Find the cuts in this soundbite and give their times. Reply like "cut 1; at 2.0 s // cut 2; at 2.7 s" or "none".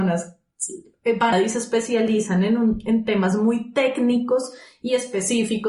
cut 1; at 1.3 s